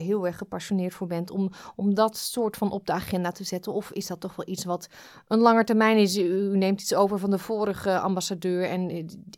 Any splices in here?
no; 0 cuts

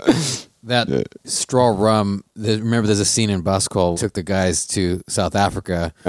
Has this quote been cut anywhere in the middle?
yes; 2 cuts; at 2.3 s, 3.9 s

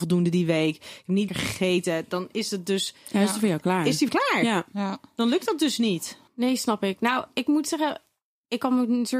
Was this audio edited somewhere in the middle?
yes; 3 cuts; at 1.3 s, 4.1 s, 6.3 s

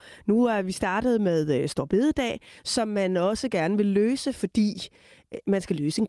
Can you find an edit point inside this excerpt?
no; 0 cuts

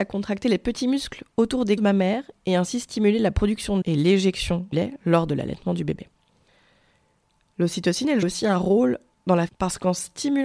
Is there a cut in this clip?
yes; 5 cuts; at 1.8 s, 3.8 s, 4.7 s, 8.2 s, 9.5 s

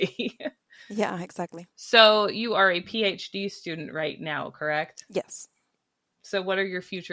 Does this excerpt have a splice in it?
yes; 1 cut; at 1.7 s

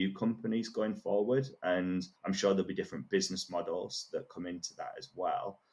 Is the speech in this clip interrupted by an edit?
yes; 1 cut; at 2.2 s

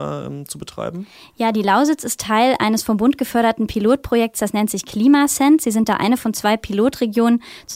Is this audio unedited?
yes; 0 cuts

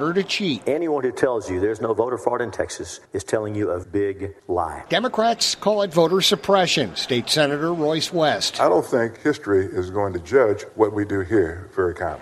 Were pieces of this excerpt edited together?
yes; 1 cut; at 3.8 s

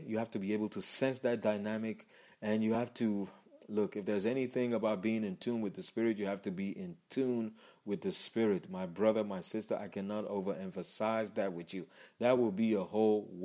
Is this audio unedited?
yes; 0 cuts

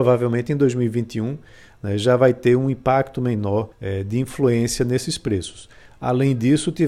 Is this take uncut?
no; 1 cut; at 3.7 s

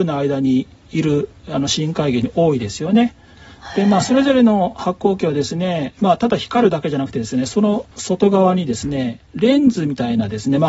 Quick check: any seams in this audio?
yes; 1 cut; at 7.9 s

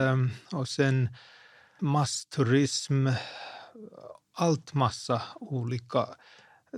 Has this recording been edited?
yes; 1 cut; at 1.8 s

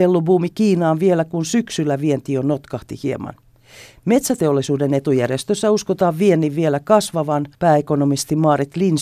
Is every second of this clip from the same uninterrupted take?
no; 1 cut; at 7.5 s

